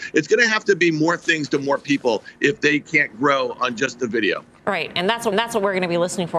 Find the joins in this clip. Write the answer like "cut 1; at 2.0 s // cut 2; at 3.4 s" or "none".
cut 1; at 4.6 s // cut 2; at 5.3 s